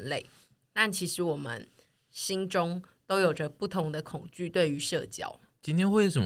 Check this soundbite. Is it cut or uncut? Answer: uncut